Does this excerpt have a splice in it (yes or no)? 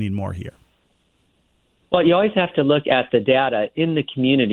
no